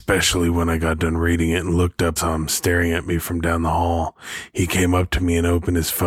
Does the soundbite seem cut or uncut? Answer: cut